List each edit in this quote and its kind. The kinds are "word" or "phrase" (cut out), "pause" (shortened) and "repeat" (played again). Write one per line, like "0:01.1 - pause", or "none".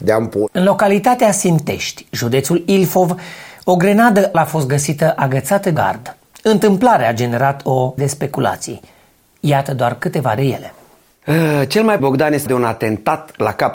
0:04.3 - word
0:05.8 - word
0:08.0 - word
0:10.4 - word
0:12.0 - word
0:12.5 - word